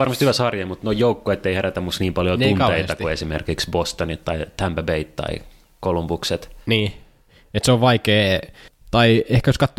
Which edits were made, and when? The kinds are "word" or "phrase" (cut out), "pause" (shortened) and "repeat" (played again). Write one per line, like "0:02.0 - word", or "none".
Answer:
none